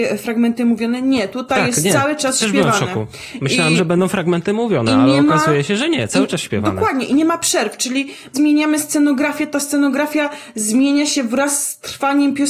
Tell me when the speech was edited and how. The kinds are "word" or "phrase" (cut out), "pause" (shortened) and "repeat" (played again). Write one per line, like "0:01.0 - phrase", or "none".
0:08.3 - phrase